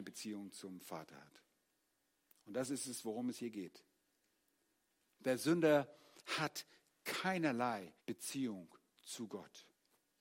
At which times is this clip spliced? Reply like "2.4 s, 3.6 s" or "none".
8.0 s